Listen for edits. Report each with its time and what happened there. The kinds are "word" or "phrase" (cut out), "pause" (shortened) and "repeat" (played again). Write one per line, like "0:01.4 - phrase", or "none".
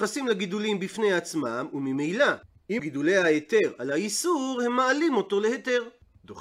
0:02.8 - word